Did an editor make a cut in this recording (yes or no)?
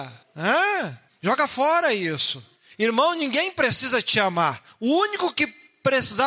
no